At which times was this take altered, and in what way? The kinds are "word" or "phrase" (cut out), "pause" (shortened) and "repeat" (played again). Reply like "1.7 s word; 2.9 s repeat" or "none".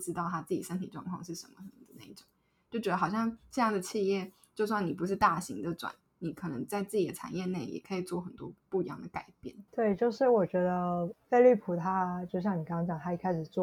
9.7 s pause